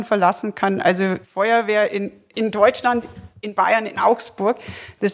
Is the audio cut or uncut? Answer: cut